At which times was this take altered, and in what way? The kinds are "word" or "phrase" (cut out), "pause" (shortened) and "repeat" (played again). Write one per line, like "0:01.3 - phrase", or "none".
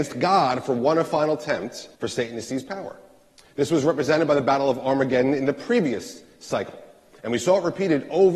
0:01.9 - pause

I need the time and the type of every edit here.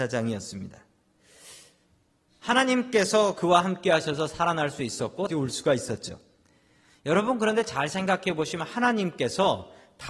0:05.3 - word

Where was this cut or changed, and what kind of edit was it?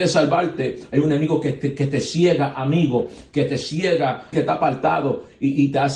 0:04.3 - word

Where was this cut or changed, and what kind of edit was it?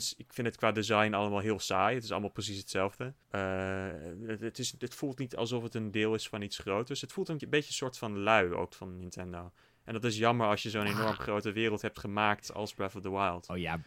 0:03.2 - pause
0:07.4 - word
0:08.7 - word

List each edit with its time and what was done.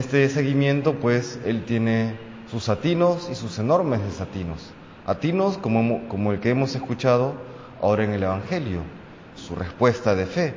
0:09.3 - word

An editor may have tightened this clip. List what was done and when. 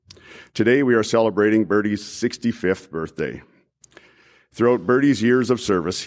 none

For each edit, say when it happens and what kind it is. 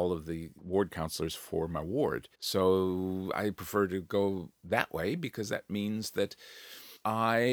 0:02.3 - pause

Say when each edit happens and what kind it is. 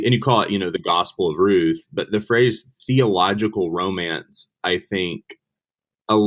none

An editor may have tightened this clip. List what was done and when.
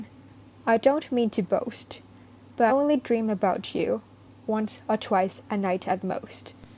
0:02.7 - word
0:05.4 - pause

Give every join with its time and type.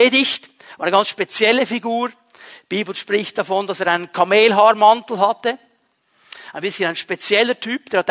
none

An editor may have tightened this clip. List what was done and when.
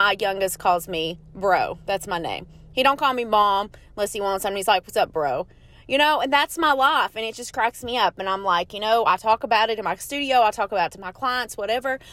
none

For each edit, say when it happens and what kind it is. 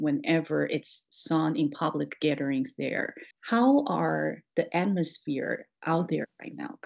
0:03.3 - pause

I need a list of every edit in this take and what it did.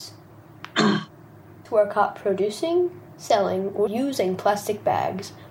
0:01.7 - word
0:03.9 - word

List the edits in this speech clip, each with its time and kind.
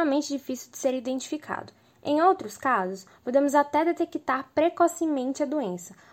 none

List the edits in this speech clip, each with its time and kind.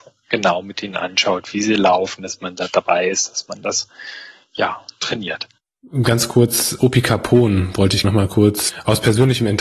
0:06.8 - word
0:08.0 - word

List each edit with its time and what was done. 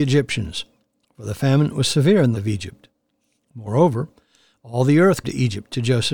0:02.3 - word
0:05.2 - word

